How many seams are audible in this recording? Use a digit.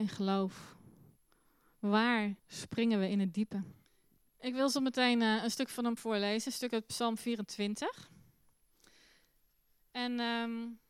3